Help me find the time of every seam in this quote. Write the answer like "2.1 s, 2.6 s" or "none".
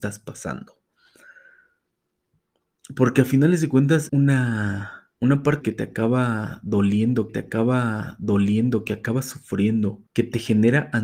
4.1 s, 5.1 s, 5.6 s, 7.3 s, 10.1 s